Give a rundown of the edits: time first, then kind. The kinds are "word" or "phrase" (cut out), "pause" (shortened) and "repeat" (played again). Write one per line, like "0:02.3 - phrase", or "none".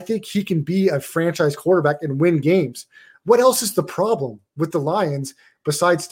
none